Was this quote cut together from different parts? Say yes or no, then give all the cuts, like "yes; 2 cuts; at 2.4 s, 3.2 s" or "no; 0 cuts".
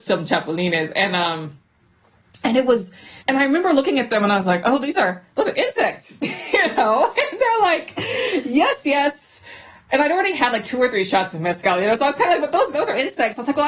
yes; 1 cut; at 3.2 s